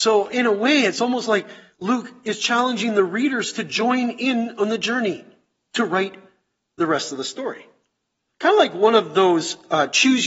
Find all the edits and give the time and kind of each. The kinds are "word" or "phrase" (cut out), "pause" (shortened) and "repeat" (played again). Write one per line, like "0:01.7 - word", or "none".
none